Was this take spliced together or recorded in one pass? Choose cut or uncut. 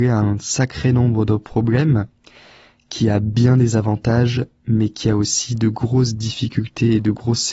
uncut